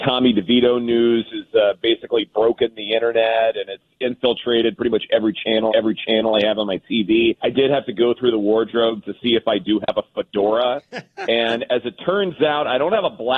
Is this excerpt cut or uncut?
cut